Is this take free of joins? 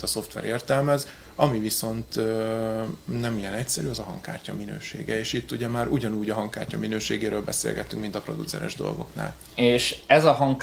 yes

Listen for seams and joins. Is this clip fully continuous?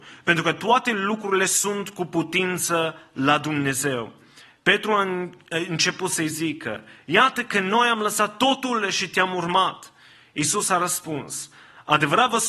yes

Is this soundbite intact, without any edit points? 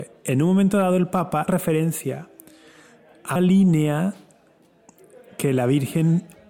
no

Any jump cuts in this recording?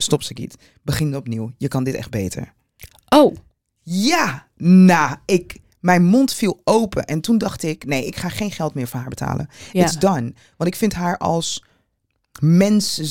no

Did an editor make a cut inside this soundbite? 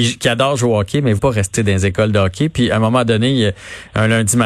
yes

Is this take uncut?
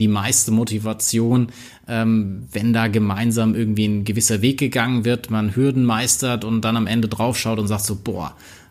yes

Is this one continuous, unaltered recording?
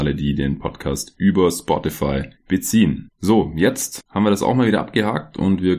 yes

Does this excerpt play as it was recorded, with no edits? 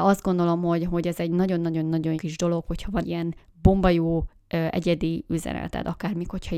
no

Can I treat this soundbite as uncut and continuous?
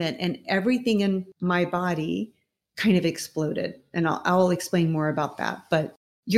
no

